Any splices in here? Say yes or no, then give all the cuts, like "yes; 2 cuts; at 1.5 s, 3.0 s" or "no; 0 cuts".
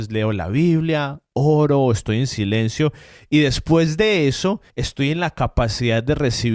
yes; 1 cut; at 4.7 s